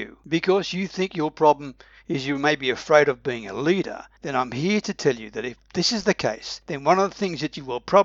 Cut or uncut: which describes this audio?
uncut